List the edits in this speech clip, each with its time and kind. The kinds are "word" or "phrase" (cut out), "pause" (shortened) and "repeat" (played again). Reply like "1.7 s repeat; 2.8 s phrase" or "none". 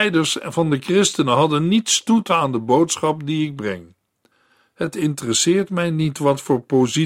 2.3 s word

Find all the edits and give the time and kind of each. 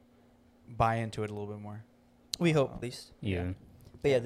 2.8 s word

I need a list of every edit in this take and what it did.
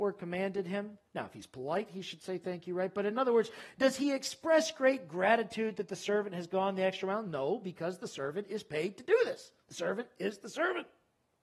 1.1 s pause

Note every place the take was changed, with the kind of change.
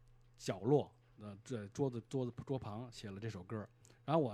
none

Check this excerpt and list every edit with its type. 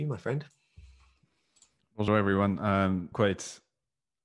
2.1 s word; 3.1 s word

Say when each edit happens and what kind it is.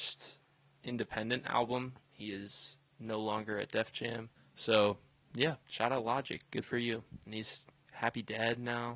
4.4 s pause; 5.6 s pause; 7.9 s word

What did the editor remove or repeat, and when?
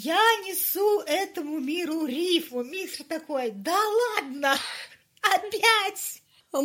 none

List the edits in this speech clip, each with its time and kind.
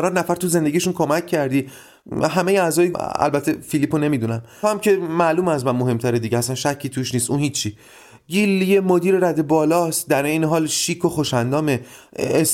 2.9 s phrase; 4.6 s word

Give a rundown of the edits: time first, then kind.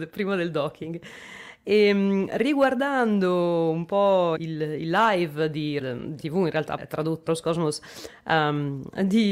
4.4 s word; 5.8 s word; 6.2 s word; 6.8 s word; 7.3 s word

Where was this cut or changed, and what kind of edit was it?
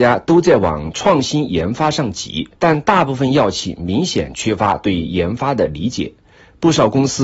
2.6 s pause

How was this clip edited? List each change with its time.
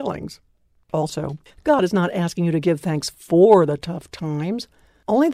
1.5 s pause

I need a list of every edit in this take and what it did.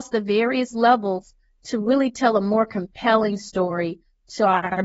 none

